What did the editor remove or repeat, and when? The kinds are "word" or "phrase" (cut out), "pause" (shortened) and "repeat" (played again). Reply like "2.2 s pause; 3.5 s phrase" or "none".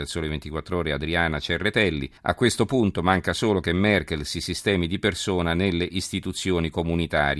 2.2 s pause